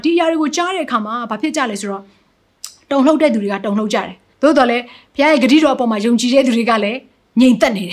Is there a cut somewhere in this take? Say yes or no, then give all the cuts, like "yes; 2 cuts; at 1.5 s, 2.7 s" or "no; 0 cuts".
yes; 1 cut; at 4.3 s